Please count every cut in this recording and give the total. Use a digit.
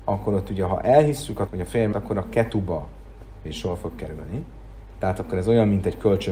3